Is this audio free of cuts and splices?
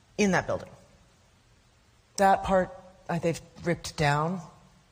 no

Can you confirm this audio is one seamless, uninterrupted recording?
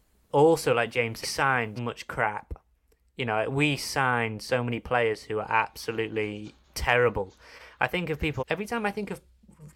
no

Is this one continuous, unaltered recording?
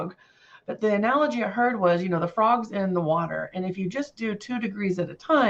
yes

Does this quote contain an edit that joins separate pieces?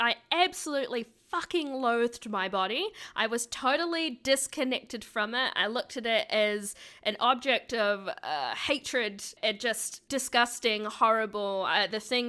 no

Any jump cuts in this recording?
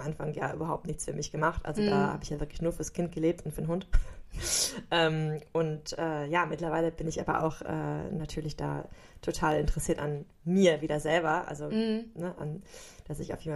no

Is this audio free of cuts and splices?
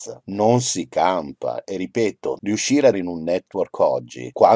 no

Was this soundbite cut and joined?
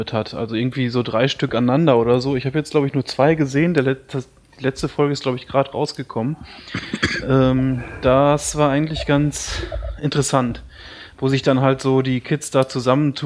no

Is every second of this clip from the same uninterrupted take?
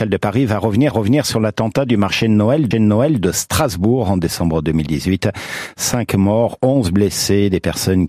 no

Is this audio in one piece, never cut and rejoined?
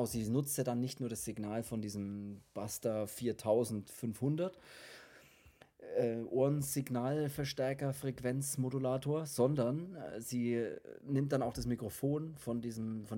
yes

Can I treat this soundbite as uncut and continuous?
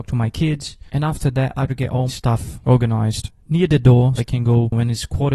no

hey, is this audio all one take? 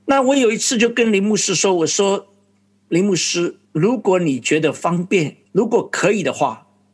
no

